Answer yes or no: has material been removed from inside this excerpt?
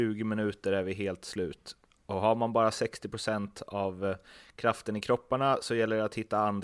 no